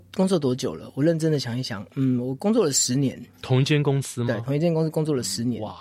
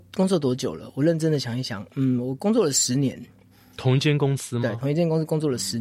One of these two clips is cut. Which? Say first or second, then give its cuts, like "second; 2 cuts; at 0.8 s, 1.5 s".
first; 1 cut; at 3.3 s